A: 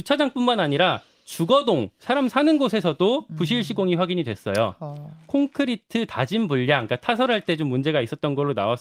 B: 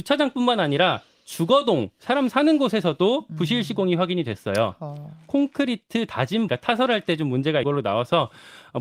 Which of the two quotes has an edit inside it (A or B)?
B